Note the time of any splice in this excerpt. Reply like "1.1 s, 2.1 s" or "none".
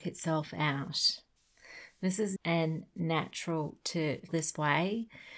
2.4 s, 4.3 s